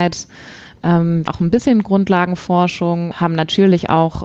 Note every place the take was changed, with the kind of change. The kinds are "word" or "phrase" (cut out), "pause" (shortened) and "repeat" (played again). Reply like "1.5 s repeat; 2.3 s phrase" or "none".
1.3 s word; 3.1 s word